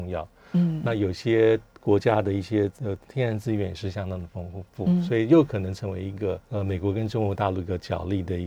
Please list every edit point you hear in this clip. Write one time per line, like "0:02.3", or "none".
0:02.8
0:06.4